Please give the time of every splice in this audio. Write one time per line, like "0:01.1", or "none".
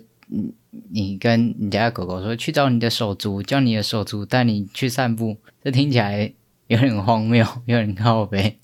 0:05.5
0:06.5